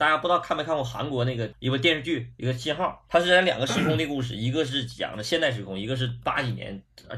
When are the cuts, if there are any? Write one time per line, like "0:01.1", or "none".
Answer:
none